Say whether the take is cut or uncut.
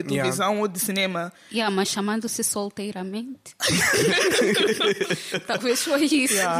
uncut